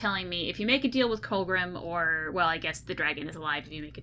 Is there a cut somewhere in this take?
no; 0 cuts

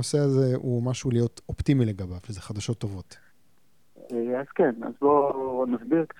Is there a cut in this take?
no; 0 cuts

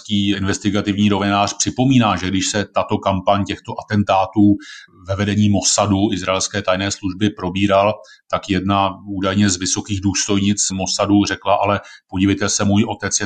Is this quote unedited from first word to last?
yes; 0 cuts

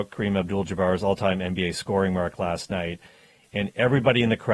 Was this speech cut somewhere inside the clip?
no; 0 cuts

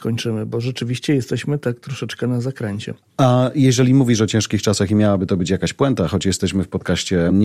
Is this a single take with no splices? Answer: yes; 0 cuts

